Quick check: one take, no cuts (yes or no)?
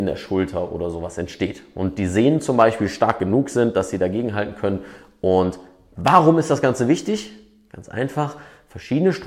yes